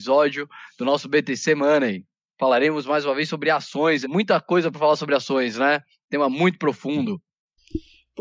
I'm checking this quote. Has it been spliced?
yes; 1 cut; at 4.0 s

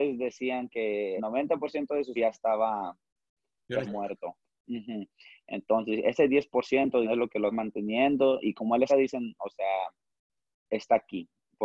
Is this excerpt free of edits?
no; 6 cuts; at 1.2 s, 2.2 s, 3.8 s, 7.0 s, 7.5 s, 8.9 s

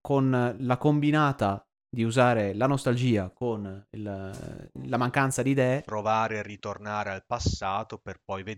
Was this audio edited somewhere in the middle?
yes; 1 cut; at 3.9 s

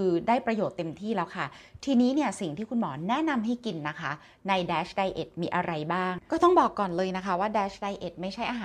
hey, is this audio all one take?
yes; 0 cuts

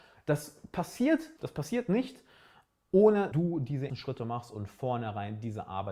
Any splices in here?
yes; 3 cuts; at 1.4 s, 3.3 s, 3.9 s

